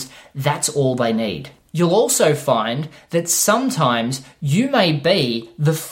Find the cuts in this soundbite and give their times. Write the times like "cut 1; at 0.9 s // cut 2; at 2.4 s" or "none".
none